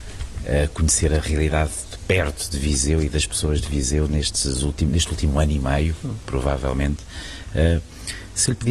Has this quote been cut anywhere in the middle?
no; 0 cuts

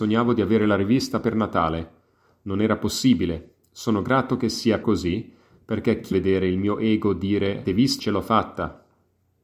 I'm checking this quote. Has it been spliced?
yes; 5 cuts; at 1.2 s, 4.8 s, 6.1 s, 7.6 s, 8.0 s

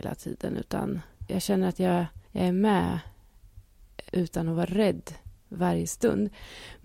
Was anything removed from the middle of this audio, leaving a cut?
yes; 4 cuts; at 1.3 s, 2.3 s, 4.1 s, 5.4 s

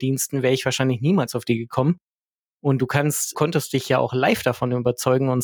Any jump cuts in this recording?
yes; 1 cut; at 3.3 s

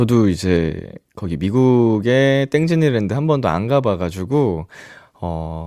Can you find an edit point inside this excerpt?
no; 0 cuts

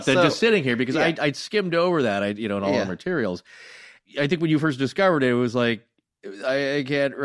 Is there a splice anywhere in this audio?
no; 0 cuts

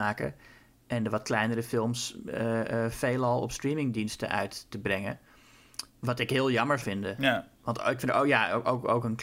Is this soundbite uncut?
no; 3 cuts; at 5.9 s, 6.8 s, 7.5 s

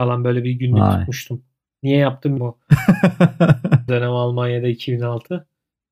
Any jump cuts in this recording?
yes; 2 cuts; at 2.4 s, 3.9 s

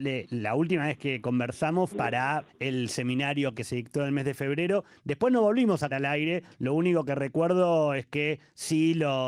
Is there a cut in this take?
yes; 4 cuts; at 1.9 s, 2.5 s, 3.5 s, 5.9 s

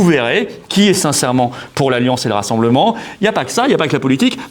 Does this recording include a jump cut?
no; 0 cuts

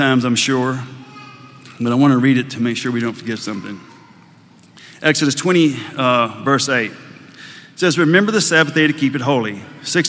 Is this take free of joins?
yes; 0 cuts

